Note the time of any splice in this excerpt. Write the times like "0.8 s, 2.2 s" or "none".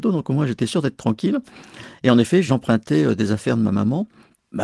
none